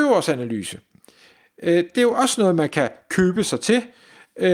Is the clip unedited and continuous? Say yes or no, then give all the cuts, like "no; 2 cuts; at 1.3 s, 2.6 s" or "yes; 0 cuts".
yes; 0 cuts